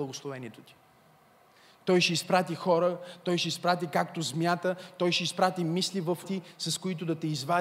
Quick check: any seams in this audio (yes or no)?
yes